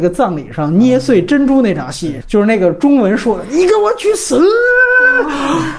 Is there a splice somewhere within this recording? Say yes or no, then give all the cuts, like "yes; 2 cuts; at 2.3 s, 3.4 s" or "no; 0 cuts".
yes; 1 cut; at 2.2 s